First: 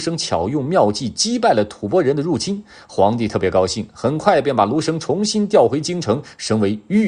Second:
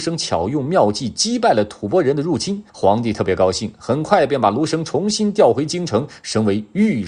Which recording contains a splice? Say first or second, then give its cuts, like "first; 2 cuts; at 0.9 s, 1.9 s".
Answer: second; 1 cut; at 2.7 s